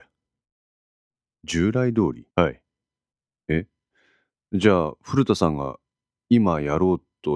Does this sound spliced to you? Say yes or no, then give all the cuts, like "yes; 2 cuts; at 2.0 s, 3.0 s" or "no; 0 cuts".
yes; 1 cut; at 2.3 s